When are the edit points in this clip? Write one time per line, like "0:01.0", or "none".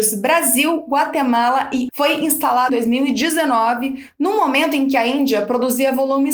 0:01.9
0:02.7